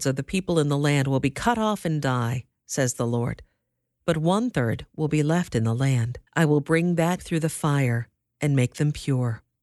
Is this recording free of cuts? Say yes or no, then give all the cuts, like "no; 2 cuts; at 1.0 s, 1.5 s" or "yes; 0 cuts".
no; 2 cuts; at 6.3 s, 7.2 s